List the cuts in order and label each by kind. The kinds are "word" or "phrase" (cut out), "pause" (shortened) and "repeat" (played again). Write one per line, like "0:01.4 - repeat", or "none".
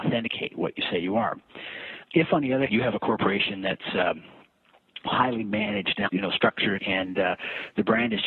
0:02.0 - word
0:02.7 - word
0:05.1 - word
0:06.1 - word
0:06.8 - word